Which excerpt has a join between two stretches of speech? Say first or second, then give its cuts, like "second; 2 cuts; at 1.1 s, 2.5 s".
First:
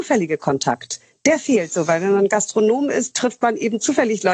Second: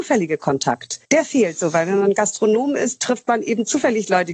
second; 1 cut; at 1.0 s